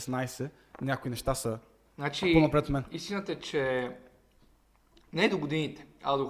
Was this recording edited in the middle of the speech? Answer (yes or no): no